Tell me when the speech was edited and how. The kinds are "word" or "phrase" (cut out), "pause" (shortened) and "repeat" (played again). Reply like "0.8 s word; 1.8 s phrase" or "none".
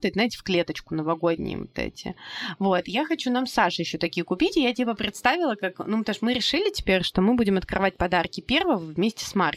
none